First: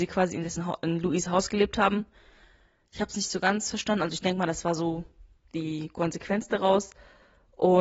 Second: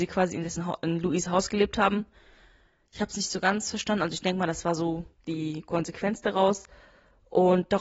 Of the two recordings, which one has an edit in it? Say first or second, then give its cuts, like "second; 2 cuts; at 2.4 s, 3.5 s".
second; 1 cut; at 5.1 s